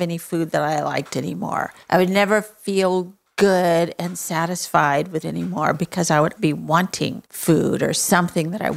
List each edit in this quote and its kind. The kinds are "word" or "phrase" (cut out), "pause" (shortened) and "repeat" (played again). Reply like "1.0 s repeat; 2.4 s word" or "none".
1.8 s pause; 5.2 s word; 6.4 s word; 7.3 s pause